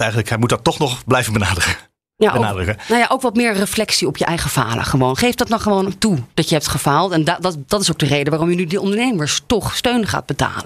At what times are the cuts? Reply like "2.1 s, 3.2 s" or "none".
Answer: none